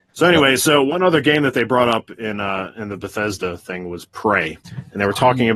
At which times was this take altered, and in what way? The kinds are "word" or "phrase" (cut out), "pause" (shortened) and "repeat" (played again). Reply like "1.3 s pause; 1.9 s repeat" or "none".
4.6 s pause